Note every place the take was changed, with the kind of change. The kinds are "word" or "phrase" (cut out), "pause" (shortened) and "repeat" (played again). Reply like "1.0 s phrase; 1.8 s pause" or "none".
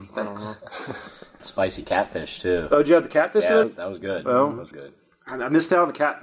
1.4 s word; 3.6 s word; 4.7 s word